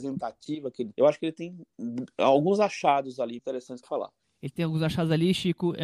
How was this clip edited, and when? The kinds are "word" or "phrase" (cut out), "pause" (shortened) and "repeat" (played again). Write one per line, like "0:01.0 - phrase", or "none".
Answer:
0:00.9 - word
0:03.4 - word
0:03.8 - phrase